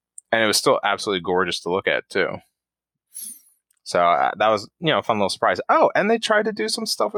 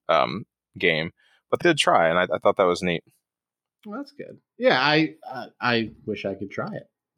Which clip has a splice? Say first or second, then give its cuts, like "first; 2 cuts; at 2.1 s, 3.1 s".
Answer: second; 1 cut; at 1.6 s